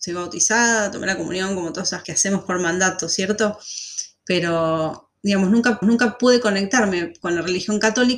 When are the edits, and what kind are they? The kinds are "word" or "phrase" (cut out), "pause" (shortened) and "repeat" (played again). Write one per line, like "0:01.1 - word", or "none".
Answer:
0:02.0 - phrase
0:05.8 - repeat